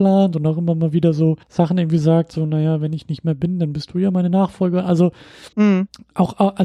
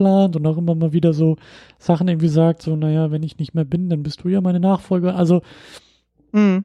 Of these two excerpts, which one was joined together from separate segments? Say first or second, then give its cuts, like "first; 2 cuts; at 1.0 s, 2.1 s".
first; 2 cuts; at 1.4 s, 5.5 s